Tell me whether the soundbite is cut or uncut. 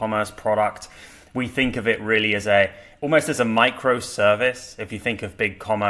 uncut